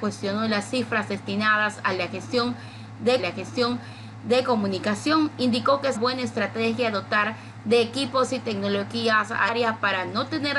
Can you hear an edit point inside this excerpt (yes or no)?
yes